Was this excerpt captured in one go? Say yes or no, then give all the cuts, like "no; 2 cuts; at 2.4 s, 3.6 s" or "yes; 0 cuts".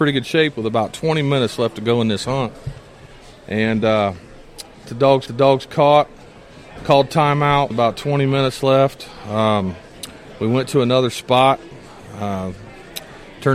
no; 3 cuts; at 4.9 s, 5.3 s, 7.7 s